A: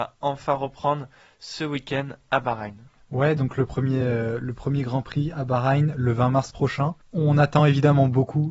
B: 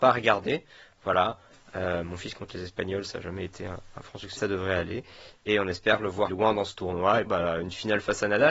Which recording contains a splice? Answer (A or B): B